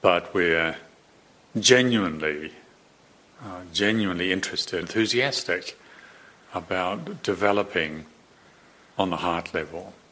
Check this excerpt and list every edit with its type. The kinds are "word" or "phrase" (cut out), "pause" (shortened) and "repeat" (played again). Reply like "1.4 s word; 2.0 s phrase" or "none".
4.8 s word